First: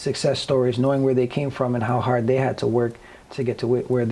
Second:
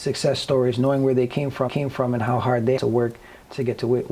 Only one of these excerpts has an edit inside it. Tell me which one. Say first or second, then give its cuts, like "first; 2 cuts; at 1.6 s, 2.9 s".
second; 2 cuts; at 1.7 s, 2.8 s